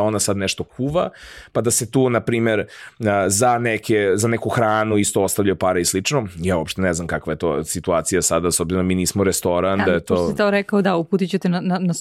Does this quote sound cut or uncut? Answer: uncut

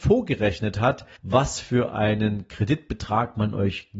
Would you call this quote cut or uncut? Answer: cut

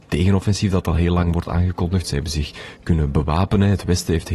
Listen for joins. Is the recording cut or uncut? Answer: uncut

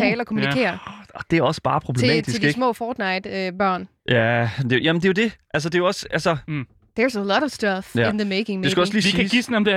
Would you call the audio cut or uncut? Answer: cut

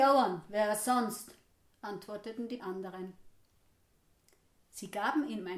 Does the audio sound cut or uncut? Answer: cut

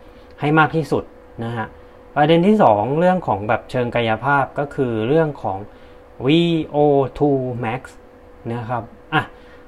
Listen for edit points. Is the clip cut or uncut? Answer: uncut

